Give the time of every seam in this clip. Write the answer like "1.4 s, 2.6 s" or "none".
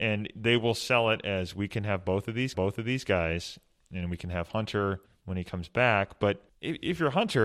2.5 s, 5.1 s, 6.5 s